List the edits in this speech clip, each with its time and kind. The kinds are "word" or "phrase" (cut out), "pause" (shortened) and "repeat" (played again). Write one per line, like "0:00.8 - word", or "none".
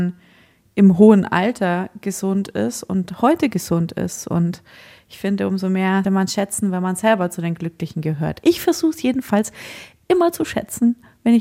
0:06.0 - word

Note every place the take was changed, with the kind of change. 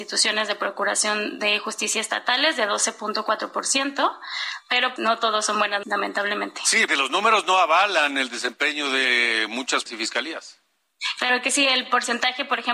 0:05.0 - word
0:05.8 - word
0:06.9 - word
0:09.9 - word

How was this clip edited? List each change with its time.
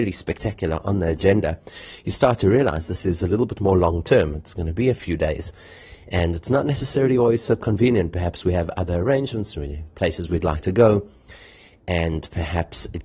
none

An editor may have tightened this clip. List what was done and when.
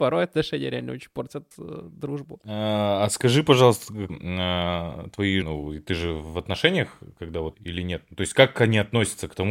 0:01.5 - pause
0:04.1 - phrase
0:05.4 - word
0:07.5 - phrase

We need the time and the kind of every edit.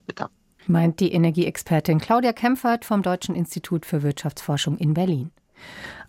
none

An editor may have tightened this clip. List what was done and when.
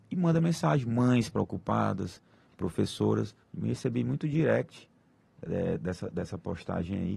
0:03.4 - pause

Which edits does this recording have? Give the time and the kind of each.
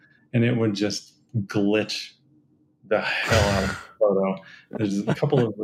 none

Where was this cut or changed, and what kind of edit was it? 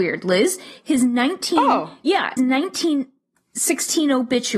0:02.4 - word

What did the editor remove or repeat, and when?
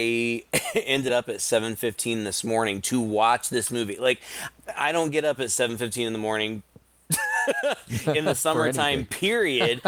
0:01.1 - phrase

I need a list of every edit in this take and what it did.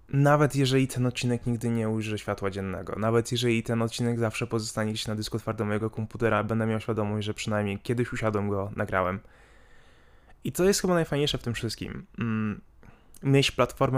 none

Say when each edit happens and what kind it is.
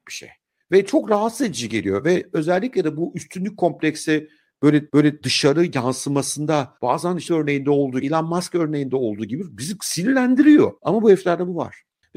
0:04.9 - repeat
0:06.8 - pause
0:07.3 - word
0:08.0 - word
0:10.8 - pause

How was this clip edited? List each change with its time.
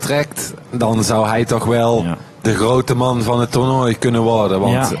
none

